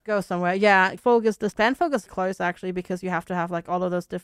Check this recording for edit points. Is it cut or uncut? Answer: cut